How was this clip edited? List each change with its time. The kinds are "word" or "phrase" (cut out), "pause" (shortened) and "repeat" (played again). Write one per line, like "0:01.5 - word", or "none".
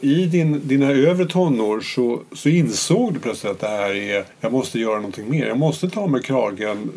0:04.3 - pause